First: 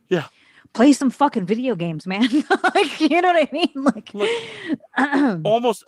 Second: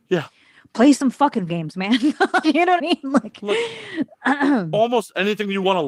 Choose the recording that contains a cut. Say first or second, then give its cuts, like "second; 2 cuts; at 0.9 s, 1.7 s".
second; 3 cuts; at 1.5 s, 2.4 s, 2.8 s